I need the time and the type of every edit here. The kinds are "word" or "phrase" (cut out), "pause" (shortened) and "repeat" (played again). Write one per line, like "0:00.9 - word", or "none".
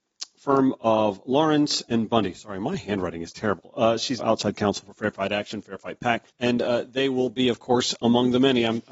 0:04.2 - word
0:06.3 - pause

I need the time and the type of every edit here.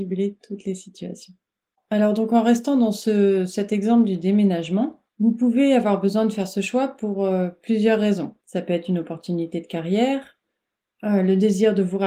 0:01.7 - pause
0:05.1 - pause
0:08.4 - pause

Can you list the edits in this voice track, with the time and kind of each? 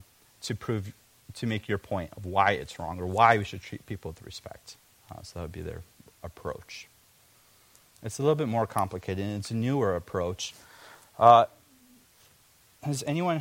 0:05.0 - pause
0:06.0 - pause

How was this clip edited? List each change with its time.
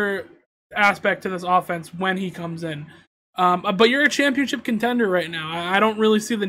none

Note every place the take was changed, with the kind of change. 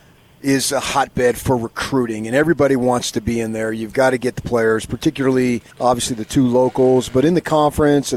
0:05.7 - pause

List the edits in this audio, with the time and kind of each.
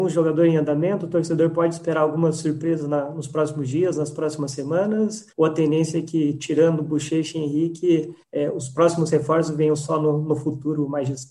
0:05.3 - pause
0:08.2 - pause

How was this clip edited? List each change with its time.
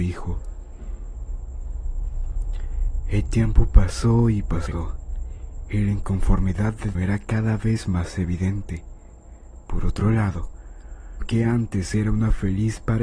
0:06.9 - word
0:11.2 - word

